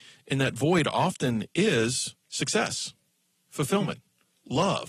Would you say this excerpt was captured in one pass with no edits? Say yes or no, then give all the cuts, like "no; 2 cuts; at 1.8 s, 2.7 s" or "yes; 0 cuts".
no; 1 cut; at 2.2 s